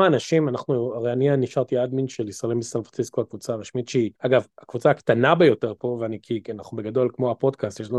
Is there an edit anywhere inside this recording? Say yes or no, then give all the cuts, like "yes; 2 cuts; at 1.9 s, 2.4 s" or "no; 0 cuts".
yes; 1 cut; at 4.2 s